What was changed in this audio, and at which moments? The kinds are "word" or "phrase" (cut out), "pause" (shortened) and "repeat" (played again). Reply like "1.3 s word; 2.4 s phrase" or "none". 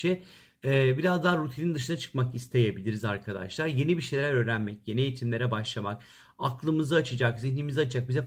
none